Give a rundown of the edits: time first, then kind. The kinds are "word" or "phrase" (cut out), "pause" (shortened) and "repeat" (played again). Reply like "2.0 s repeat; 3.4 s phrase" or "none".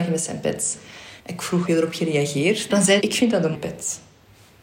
1.2 s pause; 1.6 s word; 3.0 s phrase; 3.5 s word